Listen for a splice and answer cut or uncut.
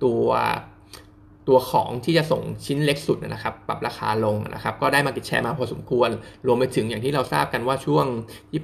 uncut